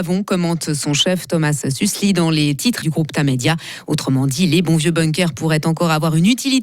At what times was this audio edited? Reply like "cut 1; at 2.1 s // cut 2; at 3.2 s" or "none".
cut 1; at 2.8 s